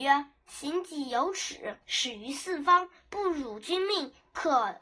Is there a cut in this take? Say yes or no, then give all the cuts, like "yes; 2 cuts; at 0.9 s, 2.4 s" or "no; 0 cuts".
yes; 1 cut; at 1.8 s